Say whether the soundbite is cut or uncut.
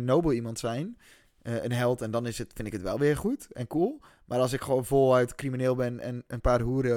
uncut